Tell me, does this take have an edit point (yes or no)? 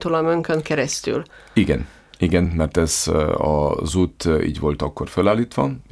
no